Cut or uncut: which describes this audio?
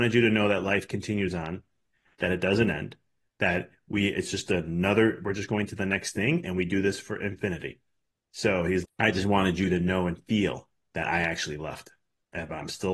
cut